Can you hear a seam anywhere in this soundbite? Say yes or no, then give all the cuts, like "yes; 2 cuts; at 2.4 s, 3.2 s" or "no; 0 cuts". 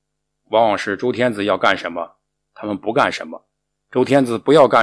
no; 0 cuts